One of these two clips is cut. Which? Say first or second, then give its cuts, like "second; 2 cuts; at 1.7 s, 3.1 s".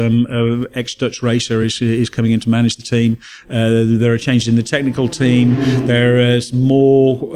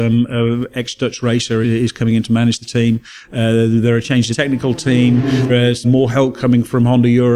second; 4 cuts; at 1.6 s, 4.3 s, 5.5 s, 5.8 s